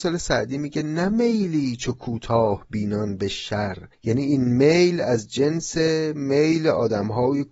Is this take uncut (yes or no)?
no